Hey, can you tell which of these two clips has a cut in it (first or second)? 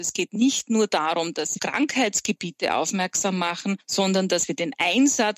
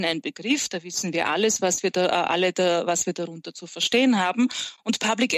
first